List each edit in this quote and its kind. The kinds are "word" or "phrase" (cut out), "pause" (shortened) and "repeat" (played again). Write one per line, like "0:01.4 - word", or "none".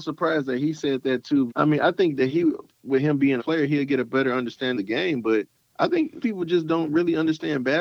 0:01.5 - word
0:03.4 - phrase
0:04.7 - word
0:05.5 - pause
0:06.2 - word